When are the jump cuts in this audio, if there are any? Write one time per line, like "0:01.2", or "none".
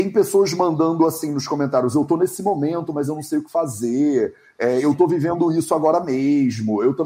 none